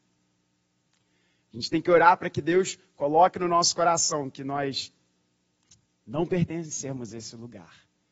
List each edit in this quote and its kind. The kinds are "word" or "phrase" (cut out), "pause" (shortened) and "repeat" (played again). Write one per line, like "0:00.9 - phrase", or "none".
none